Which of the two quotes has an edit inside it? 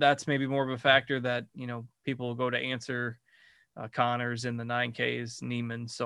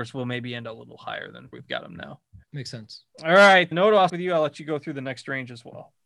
second; 5 cuts; at 1.5 s, 2.4 s, 3.1 s, 3.7 s, 4.1 s

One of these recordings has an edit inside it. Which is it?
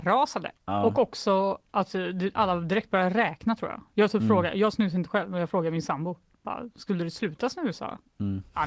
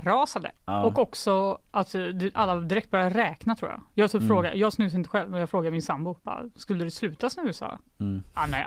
second; 1 cut; at 6.2 s

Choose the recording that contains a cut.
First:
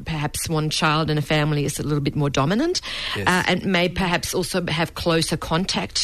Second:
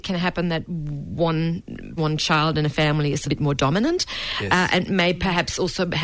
second; 2 cuts; at 2.0 s, 3.2 s

